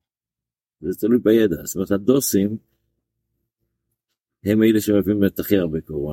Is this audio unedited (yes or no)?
yes